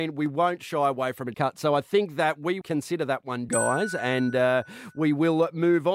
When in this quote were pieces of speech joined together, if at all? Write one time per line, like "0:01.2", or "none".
0:01.3
0:02.6
0:03.5